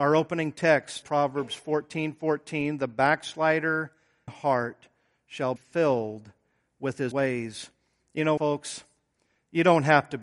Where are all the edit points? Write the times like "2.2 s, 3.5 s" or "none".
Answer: 1.0 s, 4.3 s, 5.6 s, 7.1 s, 8.4 s